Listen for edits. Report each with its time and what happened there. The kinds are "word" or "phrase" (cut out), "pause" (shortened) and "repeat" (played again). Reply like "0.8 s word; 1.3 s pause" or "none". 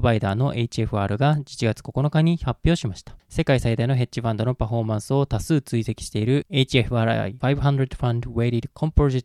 none